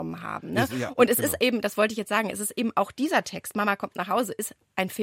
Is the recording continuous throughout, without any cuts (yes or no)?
yes